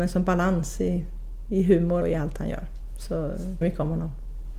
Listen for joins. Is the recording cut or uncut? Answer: cut